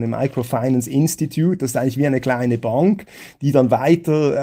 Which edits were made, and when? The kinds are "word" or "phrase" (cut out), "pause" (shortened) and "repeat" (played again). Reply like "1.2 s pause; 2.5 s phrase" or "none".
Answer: none

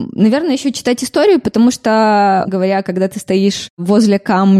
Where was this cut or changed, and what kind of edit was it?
2.5 s word

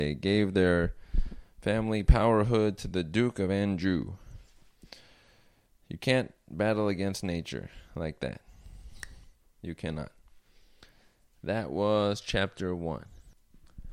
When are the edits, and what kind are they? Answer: none

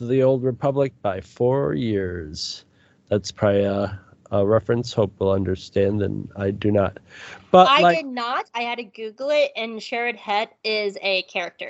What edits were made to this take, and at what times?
none

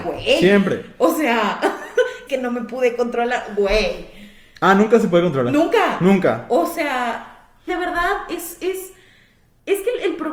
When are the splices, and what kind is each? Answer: 2.3 s word; 7.7 s word

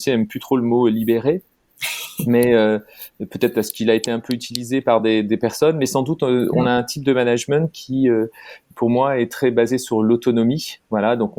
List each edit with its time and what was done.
none

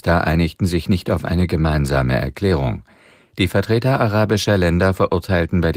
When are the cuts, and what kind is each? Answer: none

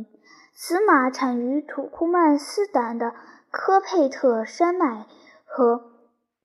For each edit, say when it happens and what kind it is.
none

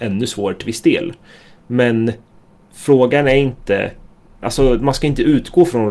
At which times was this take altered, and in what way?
none

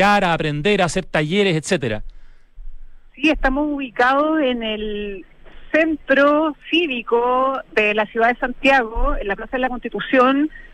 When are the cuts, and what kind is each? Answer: none

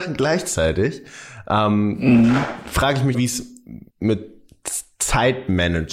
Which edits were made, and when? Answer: 3.1 s word; 3.9 s word

